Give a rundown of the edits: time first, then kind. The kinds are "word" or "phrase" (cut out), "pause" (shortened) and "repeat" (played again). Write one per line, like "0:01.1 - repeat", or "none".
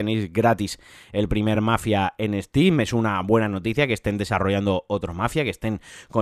none